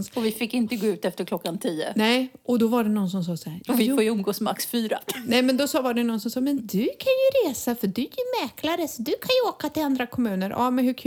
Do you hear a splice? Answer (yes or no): no